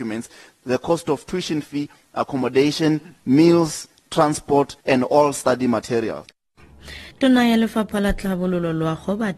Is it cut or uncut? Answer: cut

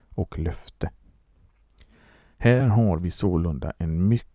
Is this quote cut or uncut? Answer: uncut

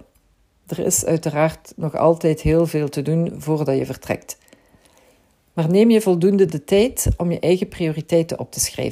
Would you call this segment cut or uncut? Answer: uncut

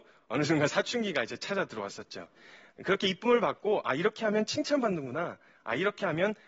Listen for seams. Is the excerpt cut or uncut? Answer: uncut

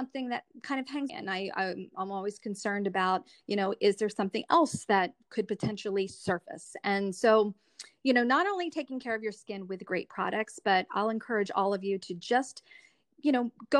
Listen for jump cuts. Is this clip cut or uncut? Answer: cut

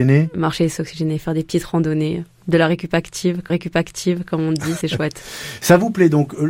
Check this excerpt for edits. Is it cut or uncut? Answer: cut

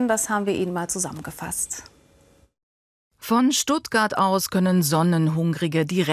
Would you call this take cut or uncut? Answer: uncut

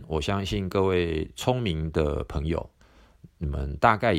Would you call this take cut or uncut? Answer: uncut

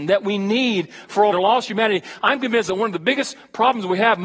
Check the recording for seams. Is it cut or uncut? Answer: cut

